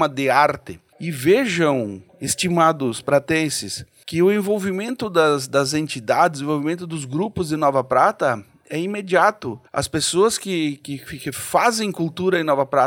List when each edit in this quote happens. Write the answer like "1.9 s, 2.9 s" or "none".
9.7 s